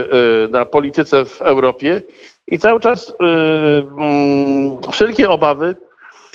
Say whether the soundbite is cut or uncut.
uncut